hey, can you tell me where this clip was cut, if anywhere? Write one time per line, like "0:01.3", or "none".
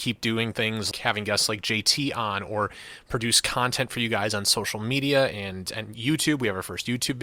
0:00.9